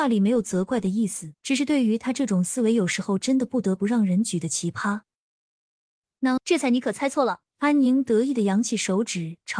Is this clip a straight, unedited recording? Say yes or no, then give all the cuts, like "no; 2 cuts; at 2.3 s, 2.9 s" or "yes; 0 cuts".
no; 3 cuts; at 1.4 s, 6.4 s, 7.5 s